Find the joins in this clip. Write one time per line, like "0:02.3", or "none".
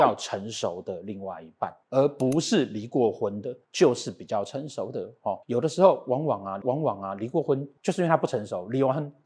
0:01.8
0:03.6
0:05.4
0:06.6
0:07.8